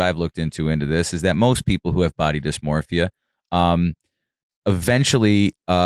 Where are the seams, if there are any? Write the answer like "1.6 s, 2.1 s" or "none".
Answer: none